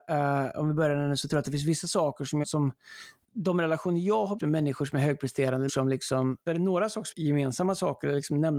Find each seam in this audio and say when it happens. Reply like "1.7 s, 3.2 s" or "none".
2.4 s, 3.2 s, 4.4 s, 5.7 s, 6.5 s, 7.1 s